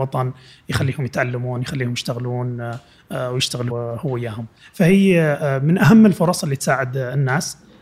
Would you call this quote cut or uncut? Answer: cut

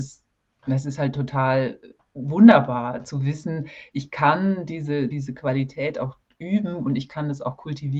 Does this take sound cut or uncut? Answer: cut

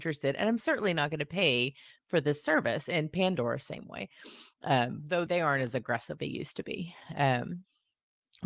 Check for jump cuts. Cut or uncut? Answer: cut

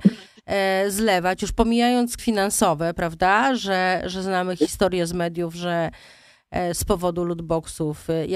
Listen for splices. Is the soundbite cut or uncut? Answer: cut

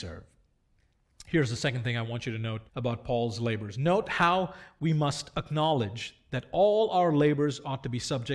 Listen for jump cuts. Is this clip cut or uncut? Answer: cut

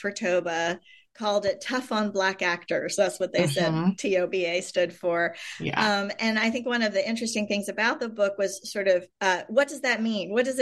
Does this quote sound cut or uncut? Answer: cut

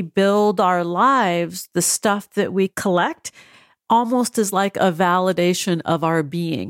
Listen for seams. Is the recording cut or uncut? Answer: uncut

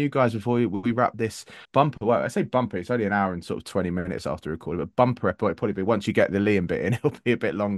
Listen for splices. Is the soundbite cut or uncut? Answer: cut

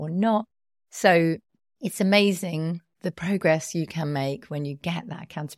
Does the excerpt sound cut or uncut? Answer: uncut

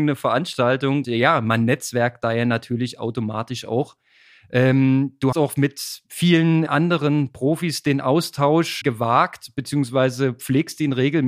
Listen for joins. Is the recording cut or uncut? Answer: cut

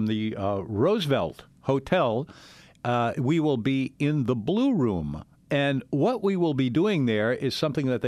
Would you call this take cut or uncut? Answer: cut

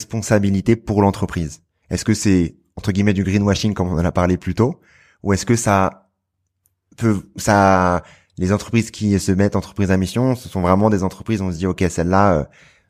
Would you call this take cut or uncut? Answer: uncut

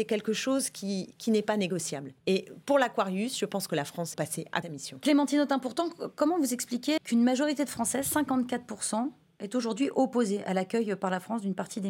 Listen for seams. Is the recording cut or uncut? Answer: cut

